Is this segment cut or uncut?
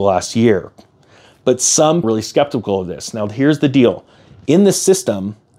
cut